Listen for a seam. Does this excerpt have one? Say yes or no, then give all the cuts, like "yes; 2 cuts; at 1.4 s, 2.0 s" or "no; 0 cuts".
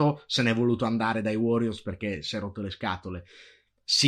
no; 0 cuts